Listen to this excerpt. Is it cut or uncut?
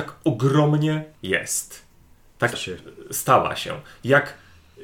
cut